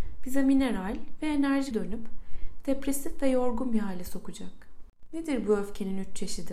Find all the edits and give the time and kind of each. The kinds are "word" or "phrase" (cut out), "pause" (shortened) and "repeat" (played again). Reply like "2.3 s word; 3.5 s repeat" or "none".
1.7 s phrase